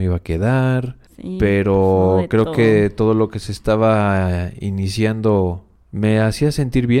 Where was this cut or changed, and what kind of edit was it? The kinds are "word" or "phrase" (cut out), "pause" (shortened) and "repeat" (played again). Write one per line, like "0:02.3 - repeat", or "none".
none